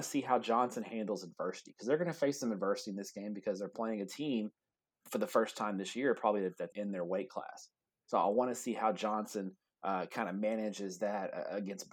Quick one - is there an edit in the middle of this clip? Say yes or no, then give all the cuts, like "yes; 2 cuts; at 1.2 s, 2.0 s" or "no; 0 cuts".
yes; 1 cut; at 6.7 s